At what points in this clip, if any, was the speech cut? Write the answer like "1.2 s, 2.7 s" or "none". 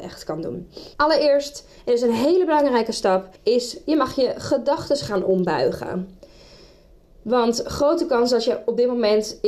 0.9 s, 3.4 s